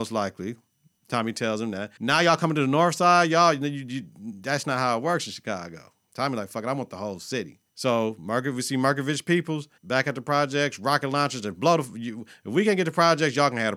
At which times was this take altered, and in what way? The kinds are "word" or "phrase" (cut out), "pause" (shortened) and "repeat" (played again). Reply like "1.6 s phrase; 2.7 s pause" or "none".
2.0 s pause; 7.7 s pause; 9.8 s pause